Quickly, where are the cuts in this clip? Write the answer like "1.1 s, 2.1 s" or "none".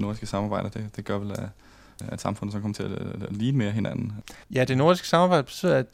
4.4 s